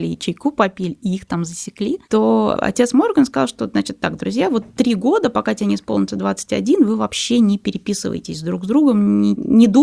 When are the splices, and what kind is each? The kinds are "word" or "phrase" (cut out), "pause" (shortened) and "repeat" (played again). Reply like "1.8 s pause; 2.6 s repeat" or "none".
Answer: 2.0 s pause

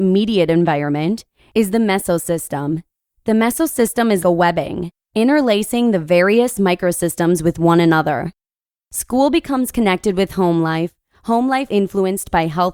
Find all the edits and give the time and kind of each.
4.2 s word; 11.7 s word

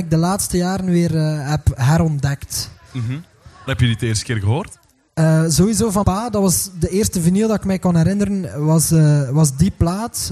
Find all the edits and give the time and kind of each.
3.7 s word; 6.0 s word

